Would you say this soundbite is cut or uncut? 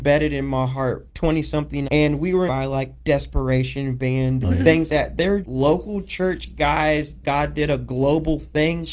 cut